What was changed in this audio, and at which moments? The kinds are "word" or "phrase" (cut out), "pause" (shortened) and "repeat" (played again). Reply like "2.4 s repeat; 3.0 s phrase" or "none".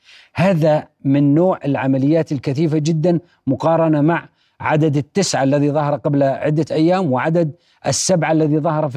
none